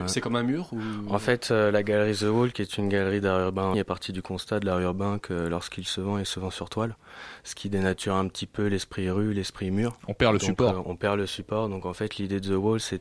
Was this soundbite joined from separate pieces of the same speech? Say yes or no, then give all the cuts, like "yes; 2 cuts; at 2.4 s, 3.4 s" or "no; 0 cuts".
yes; 1 cut; at 3.7 s